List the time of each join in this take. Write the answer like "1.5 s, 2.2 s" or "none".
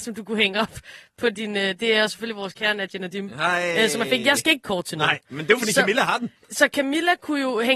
4.6 s